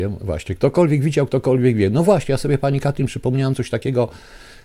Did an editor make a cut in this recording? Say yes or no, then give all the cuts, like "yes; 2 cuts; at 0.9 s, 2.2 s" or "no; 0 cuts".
no; 0 cuts